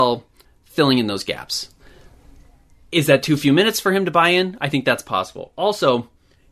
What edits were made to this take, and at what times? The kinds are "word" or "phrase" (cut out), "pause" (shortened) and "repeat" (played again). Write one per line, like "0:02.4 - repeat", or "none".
none